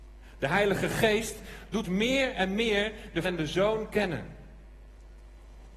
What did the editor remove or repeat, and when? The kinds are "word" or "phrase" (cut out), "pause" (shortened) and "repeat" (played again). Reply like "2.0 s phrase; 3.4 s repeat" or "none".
1.8 s word; 3.2 s word